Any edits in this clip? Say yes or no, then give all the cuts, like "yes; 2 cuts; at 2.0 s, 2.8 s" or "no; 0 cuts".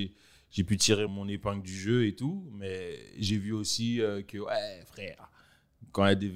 yes; 1 cut; at 1.1 s